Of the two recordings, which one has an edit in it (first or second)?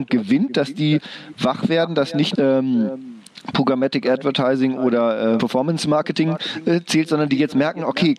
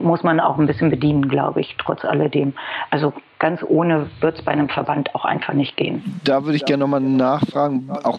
first